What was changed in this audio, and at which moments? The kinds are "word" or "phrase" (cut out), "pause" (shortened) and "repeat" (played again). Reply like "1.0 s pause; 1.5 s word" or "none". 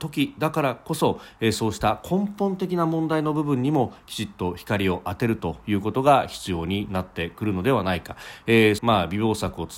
8.8 s phrase